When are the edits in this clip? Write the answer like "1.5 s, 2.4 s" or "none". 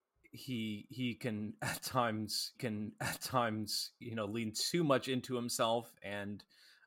2.5 s